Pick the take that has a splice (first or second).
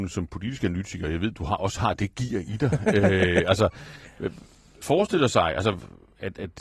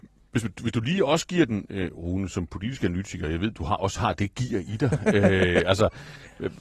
first